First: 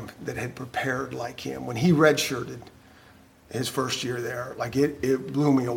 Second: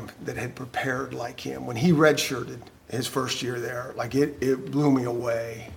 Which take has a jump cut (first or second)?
second